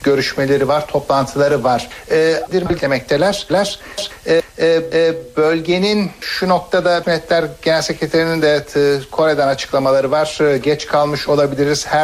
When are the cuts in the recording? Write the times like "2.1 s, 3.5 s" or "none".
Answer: 2.5 s, 7.0 s